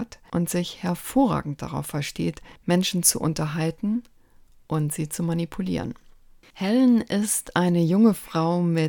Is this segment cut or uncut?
uncut